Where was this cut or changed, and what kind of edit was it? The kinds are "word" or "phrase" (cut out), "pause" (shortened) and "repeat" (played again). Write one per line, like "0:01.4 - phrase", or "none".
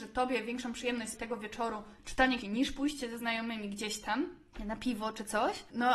0:01.1 - word
0:02.4 - word